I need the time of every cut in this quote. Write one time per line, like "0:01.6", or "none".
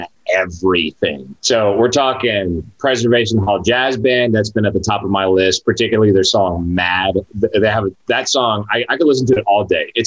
0:01.4